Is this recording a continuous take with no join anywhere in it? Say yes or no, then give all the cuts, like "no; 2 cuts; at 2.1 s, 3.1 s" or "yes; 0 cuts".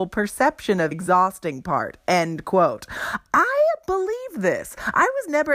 no; 1 cut; at 0.9 s